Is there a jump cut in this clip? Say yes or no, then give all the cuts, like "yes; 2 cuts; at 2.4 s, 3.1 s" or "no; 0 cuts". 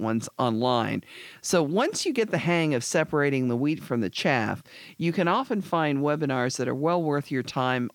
no; 0 cuts